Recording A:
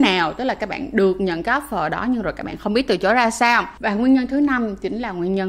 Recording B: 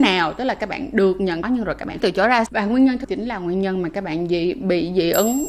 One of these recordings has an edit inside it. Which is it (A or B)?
B